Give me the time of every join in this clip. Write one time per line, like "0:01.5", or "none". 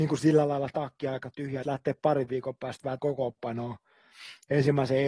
0:01.6
0:03.0